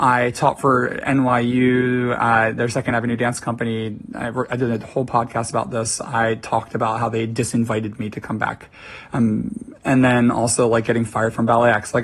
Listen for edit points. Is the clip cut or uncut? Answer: uncut